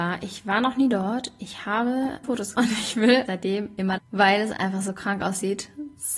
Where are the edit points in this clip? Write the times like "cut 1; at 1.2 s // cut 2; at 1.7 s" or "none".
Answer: cut 1; at 2.2 s // cut 2; at 2.5 s // cut 3; at 3.3 s // cut 4; at 4.0 s